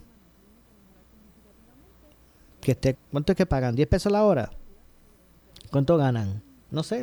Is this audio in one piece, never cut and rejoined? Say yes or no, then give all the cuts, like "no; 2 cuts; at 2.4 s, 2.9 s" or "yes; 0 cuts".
no; 1 cut; at 2.9 s